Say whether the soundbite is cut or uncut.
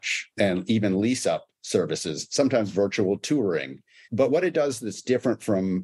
uncut